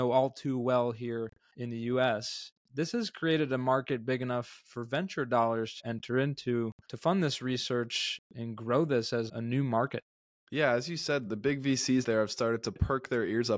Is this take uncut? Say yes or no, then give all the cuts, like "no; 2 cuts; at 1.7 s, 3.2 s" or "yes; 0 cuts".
no; 4 cuts; at 5.8 s, 9.3 s, 11.3 s, 12.0 s